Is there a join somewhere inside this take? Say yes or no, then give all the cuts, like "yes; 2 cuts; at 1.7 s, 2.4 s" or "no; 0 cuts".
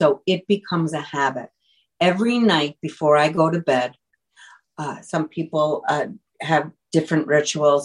no; 0 cuts